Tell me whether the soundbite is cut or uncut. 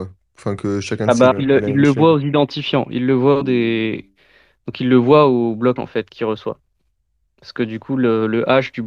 cut